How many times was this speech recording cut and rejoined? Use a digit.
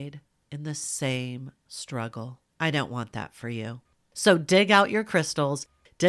2